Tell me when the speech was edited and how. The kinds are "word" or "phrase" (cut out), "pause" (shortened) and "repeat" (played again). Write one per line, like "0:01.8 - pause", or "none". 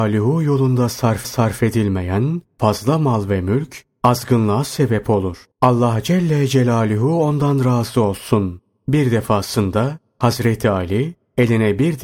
0:01.2 - repeat
0:05.5 - pause